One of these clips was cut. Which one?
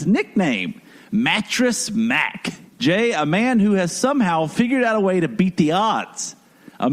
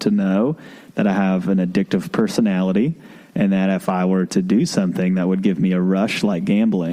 first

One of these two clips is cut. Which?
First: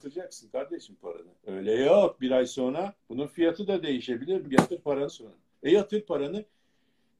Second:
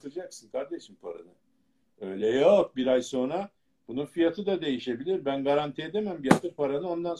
first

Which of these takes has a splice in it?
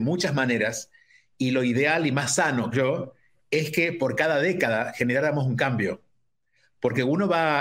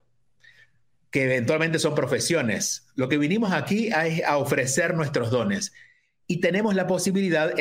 first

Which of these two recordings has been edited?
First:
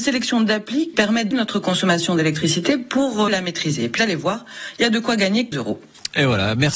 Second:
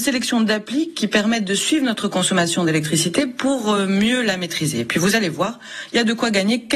first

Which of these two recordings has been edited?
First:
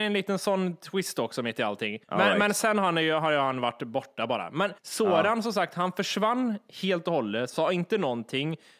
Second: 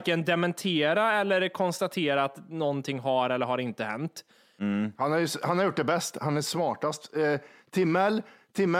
first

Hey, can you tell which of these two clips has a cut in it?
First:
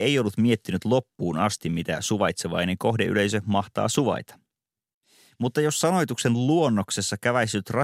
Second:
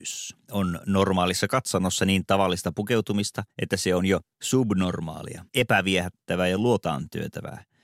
second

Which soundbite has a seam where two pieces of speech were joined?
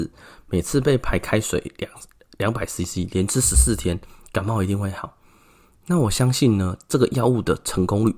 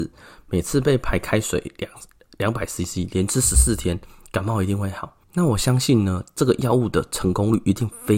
second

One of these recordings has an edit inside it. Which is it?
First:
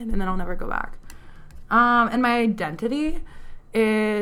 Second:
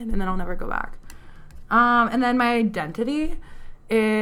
first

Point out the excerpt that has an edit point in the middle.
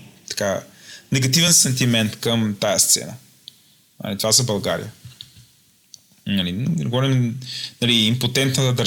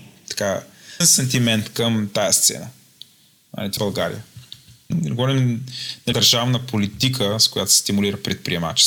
second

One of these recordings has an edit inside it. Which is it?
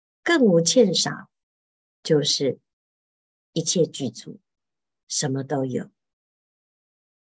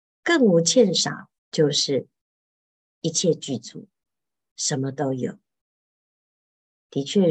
second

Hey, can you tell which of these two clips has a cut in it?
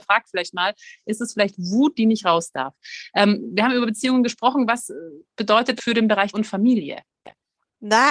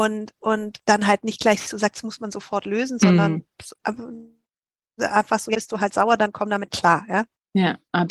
first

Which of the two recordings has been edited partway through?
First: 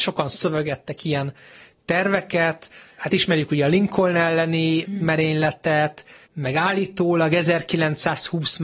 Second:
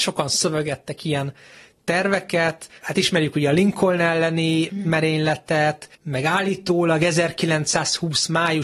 second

